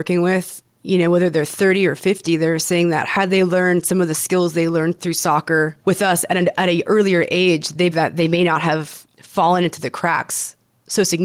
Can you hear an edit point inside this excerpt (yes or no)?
yes